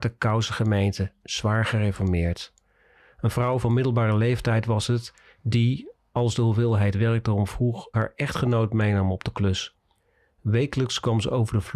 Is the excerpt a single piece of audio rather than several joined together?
no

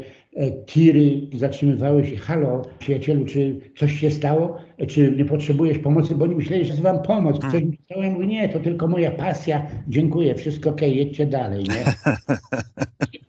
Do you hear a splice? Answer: yes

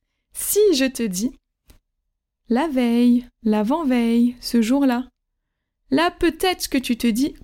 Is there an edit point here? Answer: no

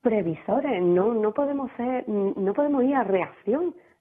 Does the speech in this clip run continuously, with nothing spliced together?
yes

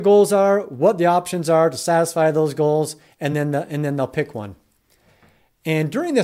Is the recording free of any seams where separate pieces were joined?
yes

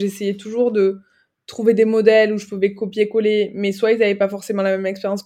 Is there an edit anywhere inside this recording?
no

